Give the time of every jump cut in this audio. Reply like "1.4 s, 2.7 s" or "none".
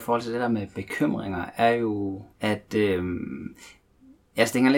2.3 s

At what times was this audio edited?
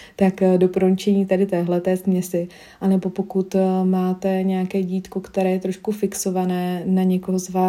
none

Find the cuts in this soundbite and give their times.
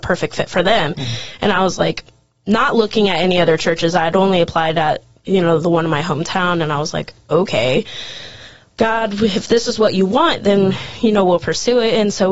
none

